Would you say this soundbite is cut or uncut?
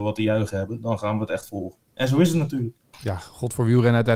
uncut